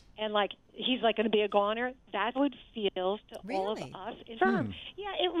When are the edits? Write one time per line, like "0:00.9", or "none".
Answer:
0:02.4
0:04.4